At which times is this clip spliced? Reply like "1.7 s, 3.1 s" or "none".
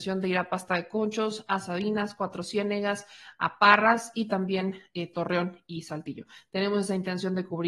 none